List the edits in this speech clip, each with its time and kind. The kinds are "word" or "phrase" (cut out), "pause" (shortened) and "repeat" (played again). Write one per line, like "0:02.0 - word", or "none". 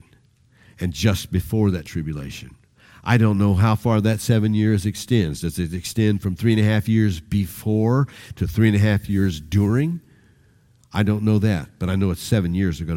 none

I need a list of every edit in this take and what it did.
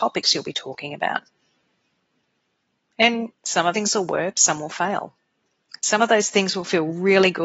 0:03.3 - word
0:03.7 - word
0:04.3 - word

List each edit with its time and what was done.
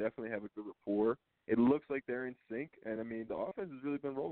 none

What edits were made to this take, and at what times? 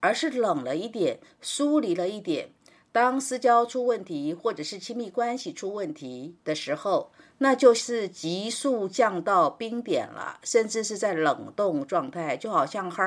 0:06.4 - pause

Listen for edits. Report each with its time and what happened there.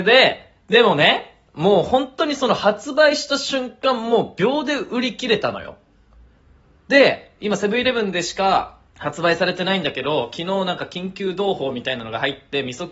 0:08.9 - pause

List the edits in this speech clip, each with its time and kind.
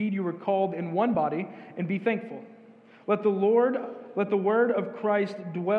none

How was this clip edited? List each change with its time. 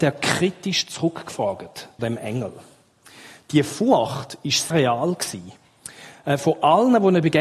0:02.0 - word
0:04.7 - word

